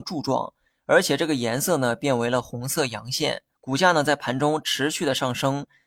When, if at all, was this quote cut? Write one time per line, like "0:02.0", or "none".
0:03.5